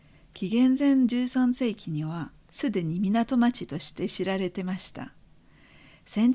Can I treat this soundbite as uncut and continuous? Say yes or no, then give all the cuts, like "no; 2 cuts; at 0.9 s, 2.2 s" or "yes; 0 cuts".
yes; 0 cuts